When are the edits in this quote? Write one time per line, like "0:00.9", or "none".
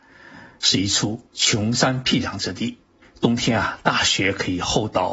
0:01.3
0:03.0